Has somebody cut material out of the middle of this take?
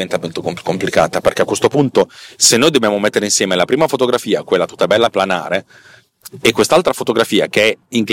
yes; 2 cuts; at 2.3 s, 5.1 s

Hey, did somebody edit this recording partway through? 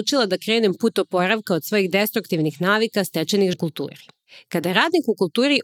yes; 1 cut; at 3.5 s

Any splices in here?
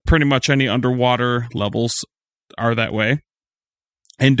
no; 0 cuts

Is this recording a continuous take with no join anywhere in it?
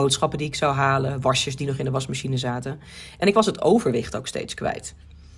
yes; 0 cuts

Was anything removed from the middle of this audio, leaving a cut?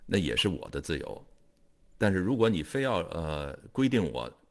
no; 0 cuts

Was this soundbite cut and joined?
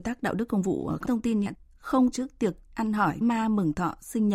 yes; 5 cuts; at 1.0 s, 1.5 s, 2.1 s, 2.6 s, 3.2 s

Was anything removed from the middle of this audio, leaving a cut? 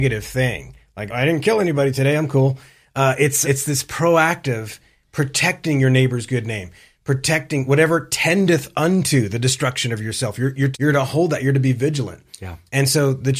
yes; 3 cuts; at 1.1 s, 3.4 s, 10.7 s

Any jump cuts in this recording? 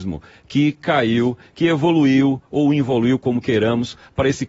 no; 0 cuts

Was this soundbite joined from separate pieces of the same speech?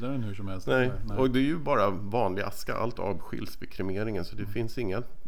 yes; 1 cut; at 3.0 s

